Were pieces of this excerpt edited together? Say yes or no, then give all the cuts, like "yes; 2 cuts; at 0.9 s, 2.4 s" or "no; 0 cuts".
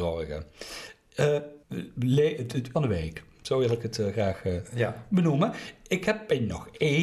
yes; 2 cuts; at 1.6 s, 2.7 s